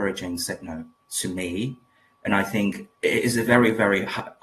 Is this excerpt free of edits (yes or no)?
no